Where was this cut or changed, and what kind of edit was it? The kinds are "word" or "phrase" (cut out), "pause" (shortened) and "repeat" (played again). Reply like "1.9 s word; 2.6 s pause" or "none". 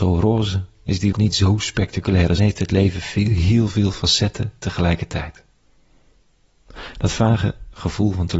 1.1 s word; 2.4 s phrase